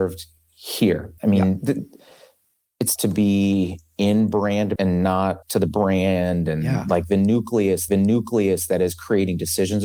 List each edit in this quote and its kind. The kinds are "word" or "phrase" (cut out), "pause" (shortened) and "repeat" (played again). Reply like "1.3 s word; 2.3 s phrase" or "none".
1.2 s pause; 3.0 s word; 4.8 s word; 5.4 s word; 7.9 s repeat